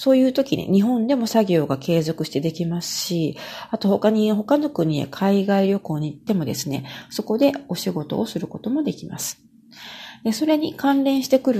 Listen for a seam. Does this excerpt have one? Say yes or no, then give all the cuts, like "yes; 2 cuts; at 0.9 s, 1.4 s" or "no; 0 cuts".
no; 0 cuts